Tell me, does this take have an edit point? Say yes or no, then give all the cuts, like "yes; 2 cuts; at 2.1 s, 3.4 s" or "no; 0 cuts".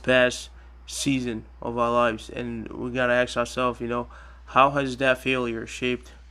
no; 0 cuts